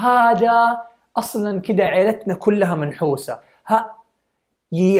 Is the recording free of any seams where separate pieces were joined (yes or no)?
yes